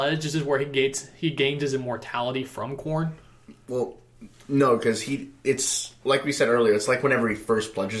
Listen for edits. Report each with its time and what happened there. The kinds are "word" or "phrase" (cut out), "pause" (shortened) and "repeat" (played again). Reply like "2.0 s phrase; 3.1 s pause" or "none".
6.0 s pause